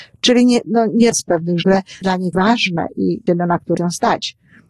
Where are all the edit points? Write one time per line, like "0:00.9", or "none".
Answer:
0:01.1
0:01.6
0:02.0
0:02.3
0:03.3
0:03.8